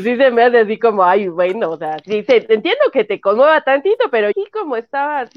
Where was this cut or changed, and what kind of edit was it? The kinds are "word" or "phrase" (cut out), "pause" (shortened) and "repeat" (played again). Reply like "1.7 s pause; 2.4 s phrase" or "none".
2.0 s word; 4.3 s word